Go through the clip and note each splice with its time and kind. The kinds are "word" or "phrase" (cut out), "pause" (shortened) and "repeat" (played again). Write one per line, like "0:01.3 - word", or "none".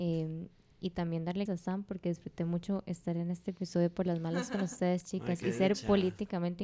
0:01.5 - word